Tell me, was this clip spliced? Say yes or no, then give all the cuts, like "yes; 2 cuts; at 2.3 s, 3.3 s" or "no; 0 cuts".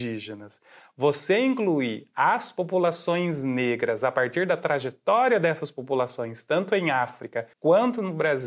yes; 1 cut; at 7.5 s